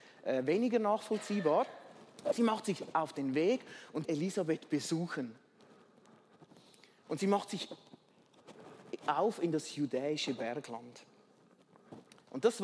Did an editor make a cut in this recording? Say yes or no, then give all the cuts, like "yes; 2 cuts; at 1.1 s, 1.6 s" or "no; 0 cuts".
yes; 1 cut; at 4.0 s